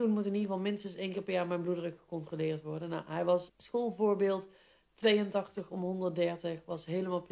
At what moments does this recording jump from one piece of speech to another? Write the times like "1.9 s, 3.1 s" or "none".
3.5 s